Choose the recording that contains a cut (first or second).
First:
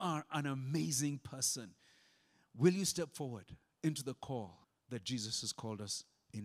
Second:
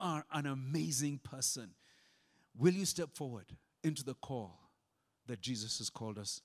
first